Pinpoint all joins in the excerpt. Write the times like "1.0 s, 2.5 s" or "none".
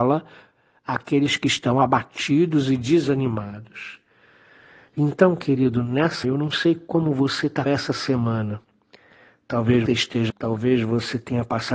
6.2 s, 7.7 s, 9.9 s, 10.3 s